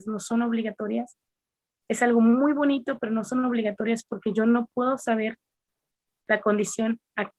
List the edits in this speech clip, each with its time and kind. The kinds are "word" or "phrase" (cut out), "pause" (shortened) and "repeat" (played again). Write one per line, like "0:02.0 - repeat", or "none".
none